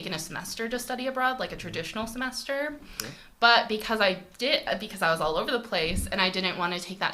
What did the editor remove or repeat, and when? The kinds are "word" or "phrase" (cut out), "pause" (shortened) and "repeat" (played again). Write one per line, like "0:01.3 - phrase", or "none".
none